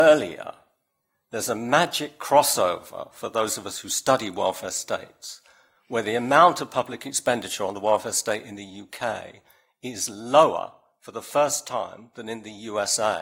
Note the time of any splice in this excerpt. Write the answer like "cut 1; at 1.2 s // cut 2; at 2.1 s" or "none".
none

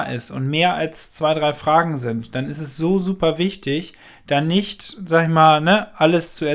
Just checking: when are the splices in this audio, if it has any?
none

